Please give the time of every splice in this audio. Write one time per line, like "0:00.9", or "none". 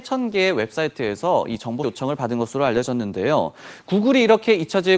0:01.8

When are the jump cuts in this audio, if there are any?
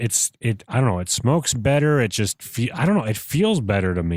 none

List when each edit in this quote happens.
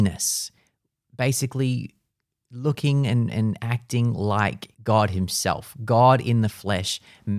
0:04.7

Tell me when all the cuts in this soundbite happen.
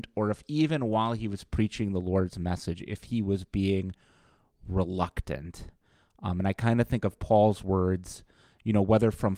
none

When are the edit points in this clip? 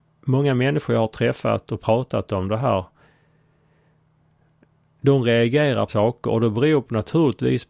0:05.9

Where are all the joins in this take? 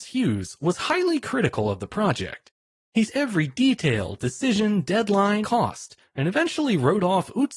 0:03.1
0:05.4

